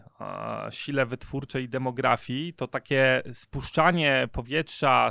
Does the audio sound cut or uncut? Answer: uncut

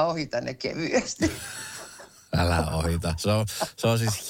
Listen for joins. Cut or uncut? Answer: uncut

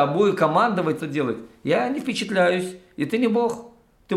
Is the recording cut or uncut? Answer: cut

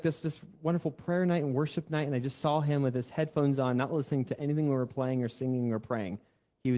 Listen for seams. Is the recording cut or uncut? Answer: uncut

